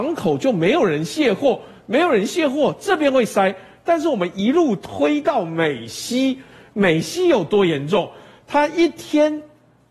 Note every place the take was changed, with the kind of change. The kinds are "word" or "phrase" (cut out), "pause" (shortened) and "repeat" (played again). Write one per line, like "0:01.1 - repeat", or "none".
none

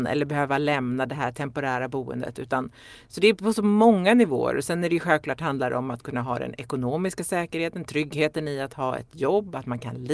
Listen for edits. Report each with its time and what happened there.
none

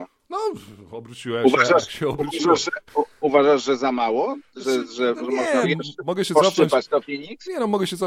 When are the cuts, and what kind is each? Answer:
0:05.6 - word

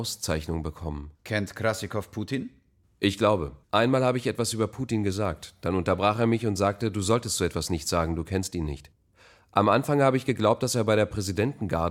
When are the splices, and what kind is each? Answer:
0:01.1 - pause
0:03.6 - pause

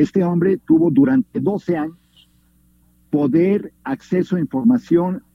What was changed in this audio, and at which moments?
0:03.8 - pause

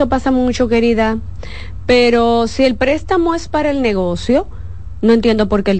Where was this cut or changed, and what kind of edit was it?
none

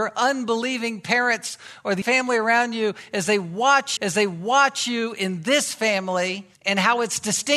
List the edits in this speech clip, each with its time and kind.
0:02.0 - word
0:04.0 - repeat
0:06.5 - pause

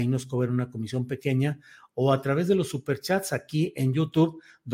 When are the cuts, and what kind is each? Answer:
none

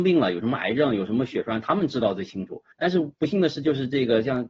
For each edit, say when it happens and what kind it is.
0:02.7 - pause

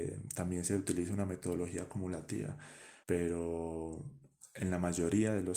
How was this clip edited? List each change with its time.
0:03.0 - pause

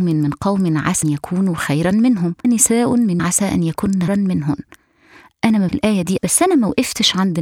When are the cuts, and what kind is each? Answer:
0:01.0 - word
0:02.4 - word
0:03.2 - word
0:04.1 - word
0:05.7 - word
0:06.2 - word

